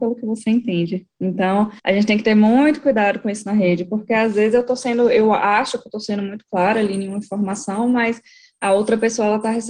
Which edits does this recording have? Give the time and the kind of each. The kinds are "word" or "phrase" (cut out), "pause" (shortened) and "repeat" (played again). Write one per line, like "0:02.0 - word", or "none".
0:01.8 - pause